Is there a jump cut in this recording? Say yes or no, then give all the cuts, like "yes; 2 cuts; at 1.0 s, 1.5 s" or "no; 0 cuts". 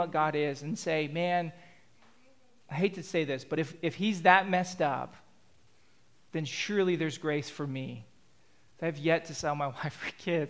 no; 0 cuts